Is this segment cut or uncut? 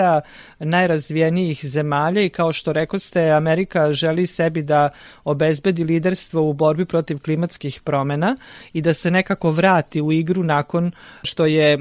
uncut